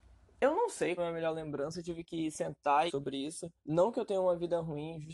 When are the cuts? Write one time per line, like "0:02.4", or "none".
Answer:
0:01.0
0:02.9
0:03.6